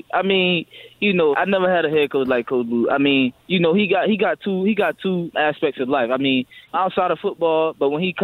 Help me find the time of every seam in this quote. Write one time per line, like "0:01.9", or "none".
0:01.3
0:03.4
0:05.3
0:06.7